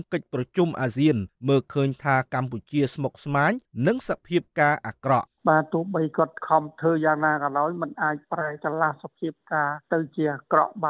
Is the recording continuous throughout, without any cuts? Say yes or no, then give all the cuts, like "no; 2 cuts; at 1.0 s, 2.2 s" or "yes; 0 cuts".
no; 1 cut; at 5.4 s